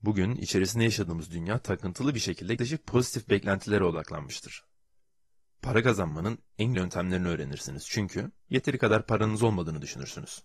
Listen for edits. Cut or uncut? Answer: cut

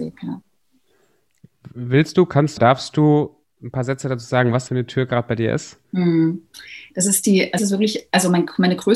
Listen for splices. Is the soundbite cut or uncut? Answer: cut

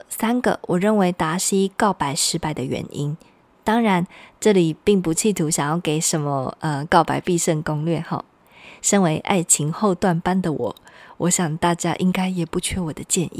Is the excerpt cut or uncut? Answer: uncut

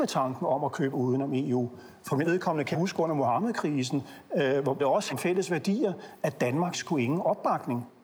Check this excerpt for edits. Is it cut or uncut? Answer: cut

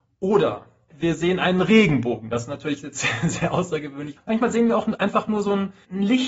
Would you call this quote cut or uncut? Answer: uncut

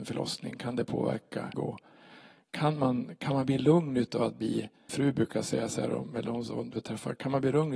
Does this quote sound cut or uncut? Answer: cut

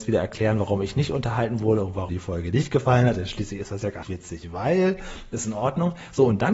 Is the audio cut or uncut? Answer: cut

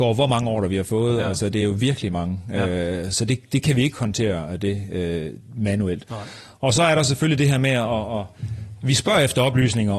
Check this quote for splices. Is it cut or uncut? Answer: uncut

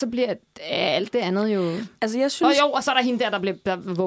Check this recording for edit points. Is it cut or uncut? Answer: uncut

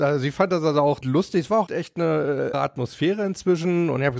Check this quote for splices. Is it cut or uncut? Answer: cut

